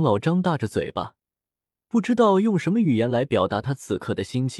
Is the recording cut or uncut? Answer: uncut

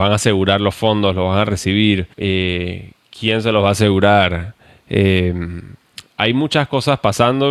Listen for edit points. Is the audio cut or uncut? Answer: cut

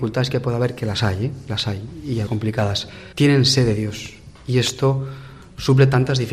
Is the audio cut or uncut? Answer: cut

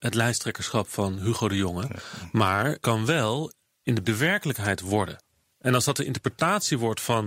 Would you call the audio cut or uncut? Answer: cut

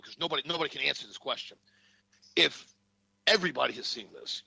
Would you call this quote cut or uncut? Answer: uncut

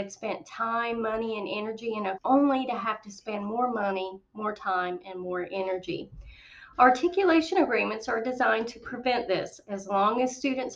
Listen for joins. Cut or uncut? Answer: cut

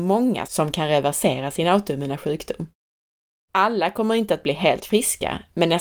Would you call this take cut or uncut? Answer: uncut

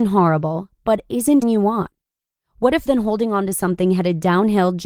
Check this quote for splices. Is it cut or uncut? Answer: cut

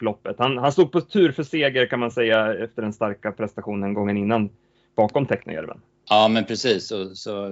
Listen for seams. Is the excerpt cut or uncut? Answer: uncut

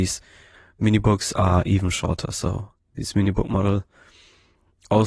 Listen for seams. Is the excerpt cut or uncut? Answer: uncut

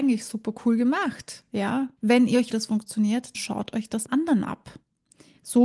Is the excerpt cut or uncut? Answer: cut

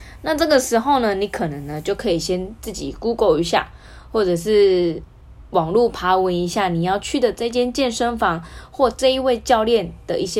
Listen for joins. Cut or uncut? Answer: uncut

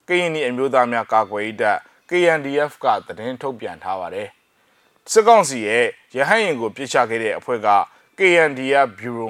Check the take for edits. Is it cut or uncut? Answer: uncut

